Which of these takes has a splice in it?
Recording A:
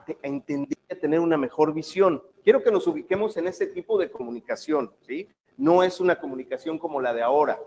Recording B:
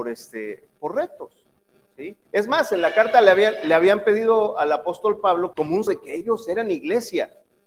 B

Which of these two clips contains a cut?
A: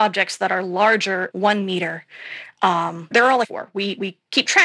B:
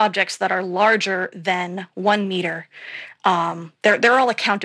A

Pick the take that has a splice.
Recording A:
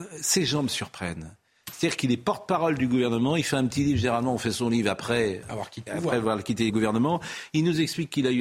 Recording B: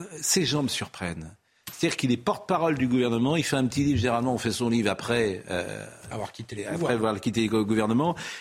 A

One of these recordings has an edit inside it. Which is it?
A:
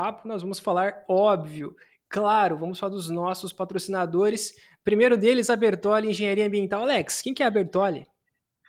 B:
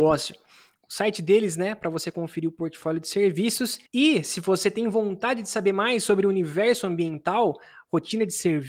B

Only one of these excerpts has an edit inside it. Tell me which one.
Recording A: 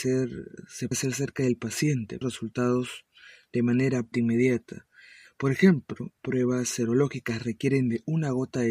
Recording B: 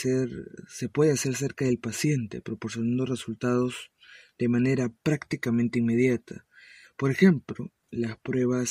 A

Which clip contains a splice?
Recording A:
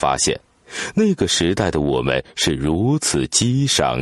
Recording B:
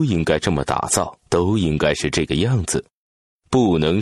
B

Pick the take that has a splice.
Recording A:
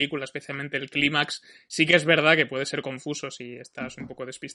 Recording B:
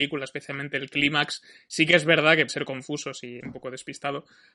B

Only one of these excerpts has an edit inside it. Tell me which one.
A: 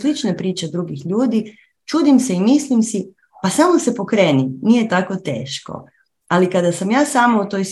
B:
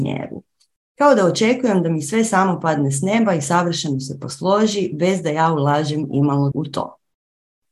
B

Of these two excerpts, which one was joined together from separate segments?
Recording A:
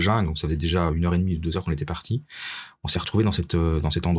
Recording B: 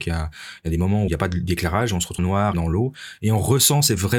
B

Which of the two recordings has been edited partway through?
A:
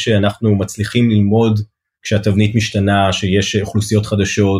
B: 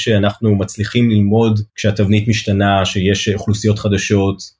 B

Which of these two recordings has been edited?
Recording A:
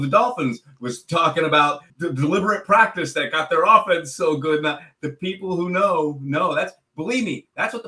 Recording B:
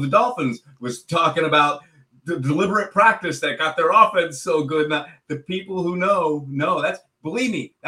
A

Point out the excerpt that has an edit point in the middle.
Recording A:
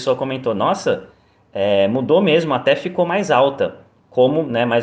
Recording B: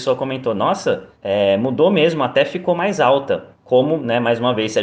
B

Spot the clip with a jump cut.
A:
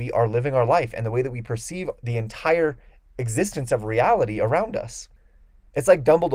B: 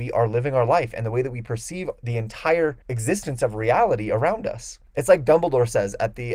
B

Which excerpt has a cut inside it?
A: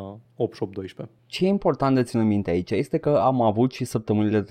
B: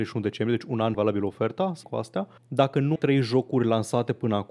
B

